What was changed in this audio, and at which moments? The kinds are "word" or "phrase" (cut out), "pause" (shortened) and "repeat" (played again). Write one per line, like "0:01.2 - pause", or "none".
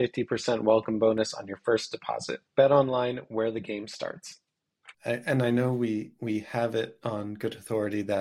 0:02.5 - pause
0:04.9 - pause